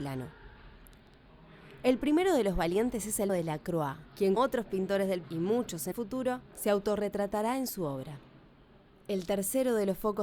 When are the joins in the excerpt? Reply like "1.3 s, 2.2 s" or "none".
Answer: 3.3 s, 4.4 s, 5.2 s, 5.9 s

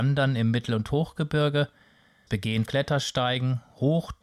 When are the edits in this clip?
2.3 s, 2.7 s

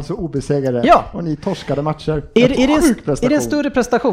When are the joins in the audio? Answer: 2.5 s

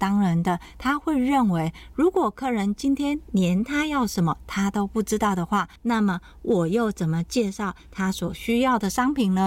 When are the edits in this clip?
5.8 s

